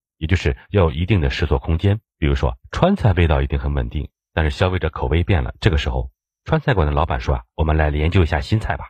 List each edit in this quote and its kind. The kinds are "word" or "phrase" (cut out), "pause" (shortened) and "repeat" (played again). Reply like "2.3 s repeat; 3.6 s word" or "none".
2.1 s pause